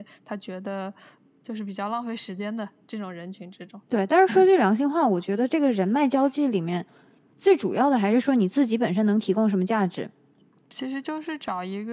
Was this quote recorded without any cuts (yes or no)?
yes